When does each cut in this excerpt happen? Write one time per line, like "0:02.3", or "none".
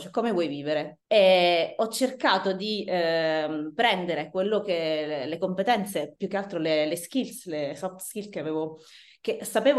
0:01.0